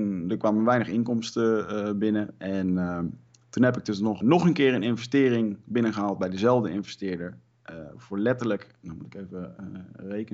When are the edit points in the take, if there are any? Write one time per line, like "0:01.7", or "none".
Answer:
0:04.2